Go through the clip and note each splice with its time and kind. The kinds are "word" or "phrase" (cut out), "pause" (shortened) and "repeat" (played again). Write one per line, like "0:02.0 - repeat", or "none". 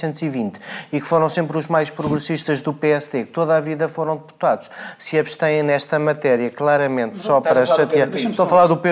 none